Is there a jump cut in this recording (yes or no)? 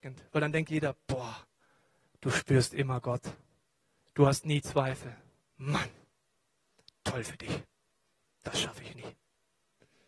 no